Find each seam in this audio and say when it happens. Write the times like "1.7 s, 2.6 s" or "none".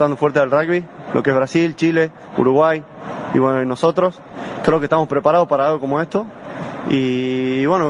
none